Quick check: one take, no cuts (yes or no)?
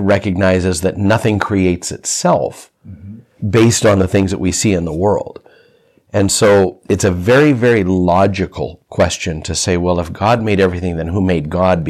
yes